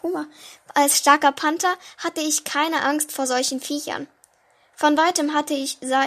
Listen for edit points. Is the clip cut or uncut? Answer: uncut